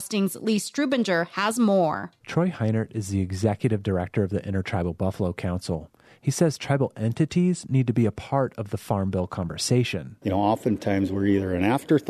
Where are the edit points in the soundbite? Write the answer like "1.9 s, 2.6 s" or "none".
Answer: none